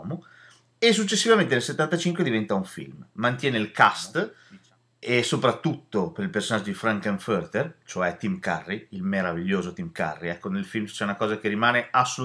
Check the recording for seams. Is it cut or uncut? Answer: uncut